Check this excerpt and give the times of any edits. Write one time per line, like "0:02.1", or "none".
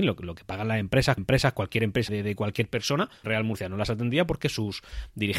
0:01.2
0:02.1
0:03.2